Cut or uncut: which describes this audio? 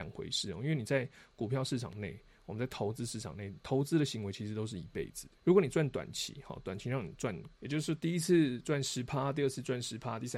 cut